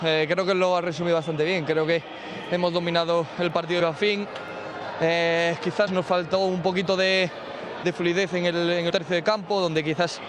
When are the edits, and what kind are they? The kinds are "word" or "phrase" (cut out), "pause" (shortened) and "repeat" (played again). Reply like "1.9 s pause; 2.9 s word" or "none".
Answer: 3.8 s phrase; 5.9 s word; 7.8 s word; 8.9 s word